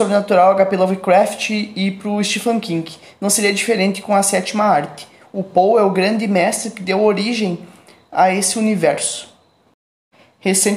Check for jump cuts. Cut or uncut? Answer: uncut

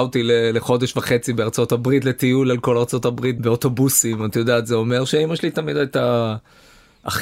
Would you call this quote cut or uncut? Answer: uncut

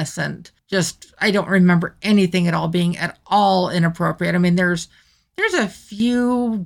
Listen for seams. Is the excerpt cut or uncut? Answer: uncut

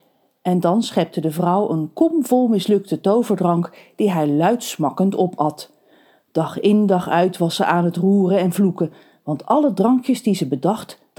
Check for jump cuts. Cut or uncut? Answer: uncut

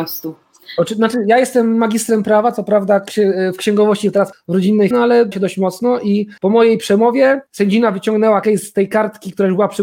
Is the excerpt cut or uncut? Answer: cut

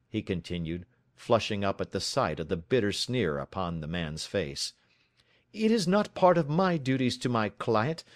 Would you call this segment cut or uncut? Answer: uncut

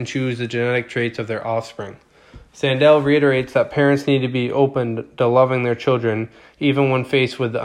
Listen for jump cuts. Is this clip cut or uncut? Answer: uncut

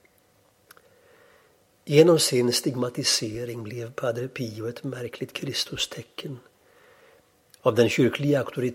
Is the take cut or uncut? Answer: uncut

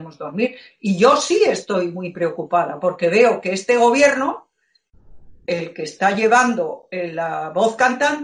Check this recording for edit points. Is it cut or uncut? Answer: uncut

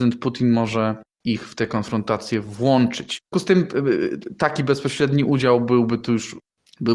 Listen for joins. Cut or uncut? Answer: cut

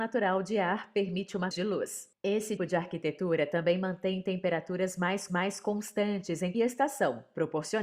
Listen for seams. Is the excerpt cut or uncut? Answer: cut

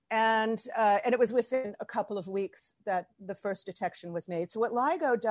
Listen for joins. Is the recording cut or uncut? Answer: uncut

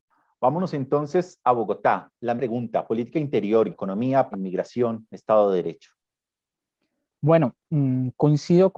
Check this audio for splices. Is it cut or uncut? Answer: cut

